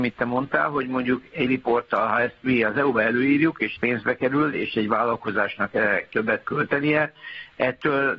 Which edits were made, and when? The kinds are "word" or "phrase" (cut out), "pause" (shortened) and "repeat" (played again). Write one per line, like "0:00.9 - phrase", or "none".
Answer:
0:01.5 - word
0:03.8 - word
0:06.4 - word